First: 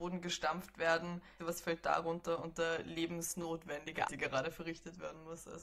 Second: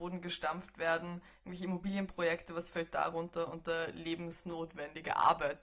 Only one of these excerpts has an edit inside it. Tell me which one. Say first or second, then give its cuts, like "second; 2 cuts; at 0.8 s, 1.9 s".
first; 2 cuts; at 1.4 s, 4.1 s